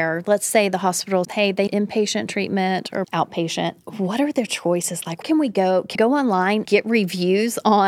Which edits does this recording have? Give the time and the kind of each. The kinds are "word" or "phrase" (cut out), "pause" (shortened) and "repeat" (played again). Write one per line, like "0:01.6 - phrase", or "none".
0:01.2 - word
0:01.7 - word
0:03.0 - word
0:05.2 - word
0:05.9 - word
0:06.6 - word